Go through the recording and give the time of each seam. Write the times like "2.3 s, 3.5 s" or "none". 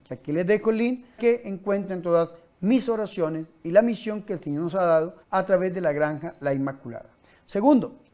1.2 s, 5.2 s